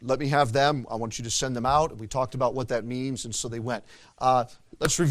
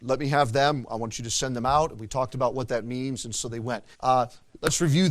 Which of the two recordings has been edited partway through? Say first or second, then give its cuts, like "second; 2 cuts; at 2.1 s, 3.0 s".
second; 1 cut; at 3.9 s